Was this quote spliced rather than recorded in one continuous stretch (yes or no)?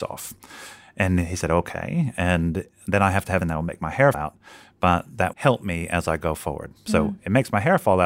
yes